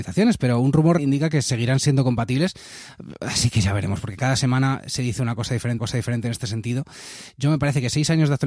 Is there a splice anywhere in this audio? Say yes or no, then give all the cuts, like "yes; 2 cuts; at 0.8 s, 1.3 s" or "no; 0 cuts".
yes; 2 cuts; at 1.0 s, 5.8 s